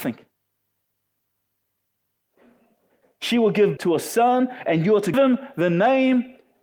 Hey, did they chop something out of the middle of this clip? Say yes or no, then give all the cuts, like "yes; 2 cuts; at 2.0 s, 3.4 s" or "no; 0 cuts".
yes; 2 cuts; at 3.8 s, 5.1 s